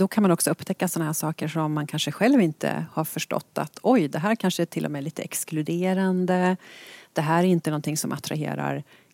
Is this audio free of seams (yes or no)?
yes